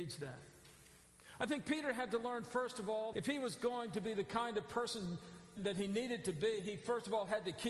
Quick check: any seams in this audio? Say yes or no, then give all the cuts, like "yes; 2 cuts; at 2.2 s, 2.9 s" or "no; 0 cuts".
yes; 2 cuts; at 3.1 s, 5.6 s